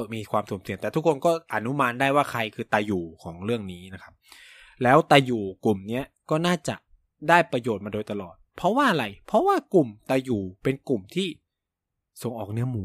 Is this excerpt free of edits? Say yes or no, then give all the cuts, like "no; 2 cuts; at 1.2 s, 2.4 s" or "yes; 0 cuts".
yes; 0 cuts